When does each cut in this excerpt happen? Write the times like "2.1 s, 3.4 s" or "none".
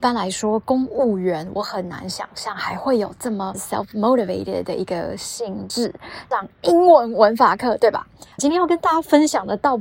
8.3 s